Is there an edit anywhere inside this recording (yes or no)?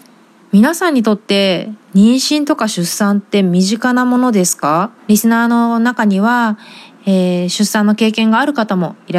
yes